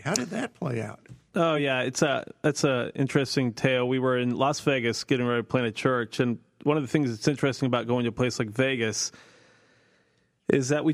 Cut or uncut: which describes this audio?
uncut